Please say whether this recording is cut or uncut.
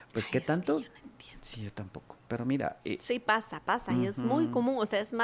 cut